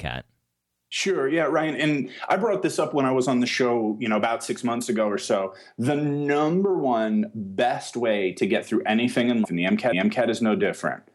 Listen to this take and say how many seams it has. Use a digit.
3